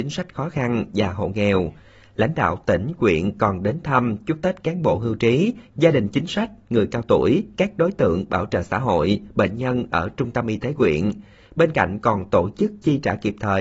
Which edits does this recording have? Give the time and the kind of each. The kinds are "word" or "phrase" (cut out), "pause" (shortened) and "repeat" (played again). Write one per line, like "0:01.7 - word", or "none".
none